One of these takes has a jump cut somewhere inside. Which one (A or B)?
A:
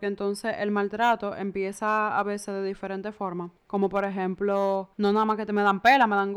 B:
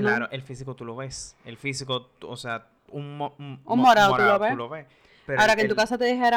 A